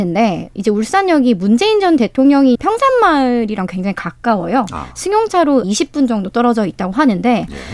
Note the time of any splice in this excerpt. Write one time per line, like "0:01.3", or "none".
0:02.6
0:05.6